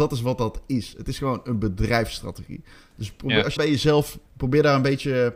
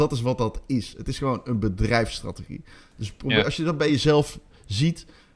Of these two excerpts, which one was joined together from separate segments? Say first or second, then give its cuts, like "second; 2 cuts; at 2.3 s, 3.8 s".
first; 2 cuts; at 3.6 s, 4.3 s